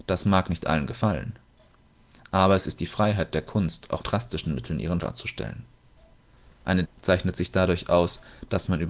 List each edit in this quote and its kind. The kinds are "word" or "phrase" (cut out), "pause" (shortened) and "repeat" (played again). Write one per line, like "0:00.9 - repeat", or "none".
0:04.0 - word
0:05.0 - word
0:06.8 - word